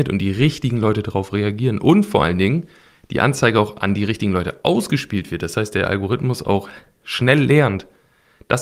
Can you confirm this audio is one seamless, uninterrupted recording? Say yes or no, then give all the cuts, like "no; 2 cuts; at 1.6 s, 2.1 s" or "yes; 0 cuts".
yes; 0 cuts